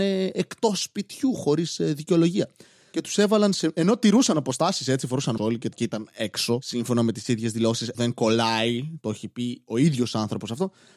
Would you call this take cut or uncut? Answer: cut